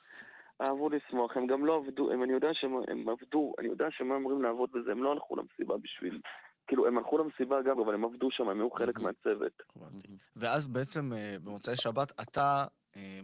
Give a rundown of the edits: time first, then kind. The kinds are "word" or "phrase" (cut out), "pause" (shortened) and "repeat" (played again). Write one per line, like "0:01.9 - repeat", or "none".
0:07.8 - word
0:10.3 - pause